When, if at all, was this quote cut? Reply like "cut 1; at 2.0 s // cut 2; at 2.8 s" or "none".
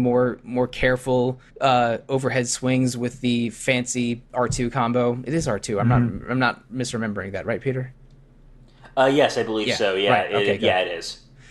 cut 1; at 1.5 s